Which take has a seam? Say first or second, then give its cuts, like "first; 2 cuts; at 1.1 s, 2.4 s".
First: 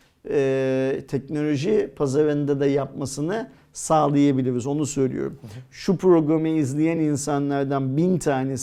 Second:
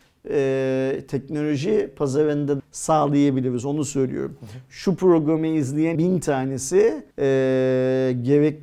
second; 3 cuts; at 2.6 s, 5.9 s, 7.1 s